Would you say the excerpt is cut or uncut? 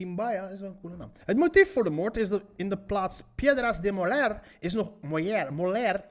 cut